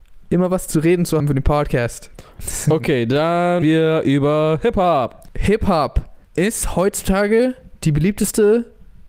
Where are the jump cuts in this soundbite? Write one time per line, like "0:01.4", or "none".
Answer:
0:01.2
0:03.6
0:06.2